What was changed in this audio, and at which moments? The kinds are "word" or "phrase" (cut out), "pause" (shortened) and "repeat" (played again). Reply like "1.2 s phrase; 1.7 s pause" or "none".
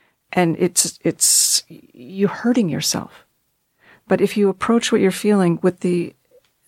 none